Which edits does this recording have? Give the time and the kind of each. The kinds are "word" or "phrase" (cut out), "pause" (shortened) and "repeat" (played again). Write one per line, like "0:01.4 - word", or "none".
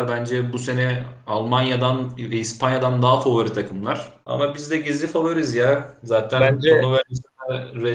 0:04.2 - pause